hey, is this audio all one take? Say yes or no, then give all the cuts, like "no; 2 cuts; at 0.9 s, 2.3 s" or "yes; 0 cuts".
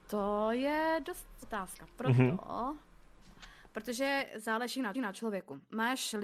no; 2 cuts; at 1.4 s, 4.9 s